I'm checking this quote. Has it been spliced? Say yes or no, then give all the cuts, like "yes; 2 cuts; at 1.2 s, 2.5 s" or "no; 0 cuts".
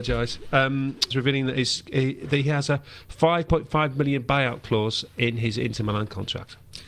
yes; 1 cut; at 1.1 s